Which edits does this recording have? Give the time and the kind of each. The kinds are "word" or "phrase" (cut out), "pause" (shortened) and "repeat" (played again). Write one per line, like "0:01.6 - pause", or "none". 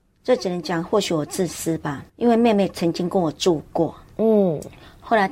0:02.1 - pause